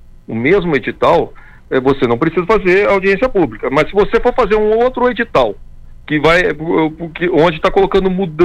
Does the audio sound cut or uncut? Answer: uncut